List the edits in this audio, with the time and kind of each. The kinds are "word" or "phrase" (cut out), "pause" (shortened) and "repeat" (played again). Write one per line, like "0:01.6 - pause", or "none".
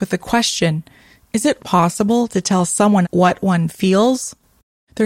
0:01.6 - word
0:03.0 - word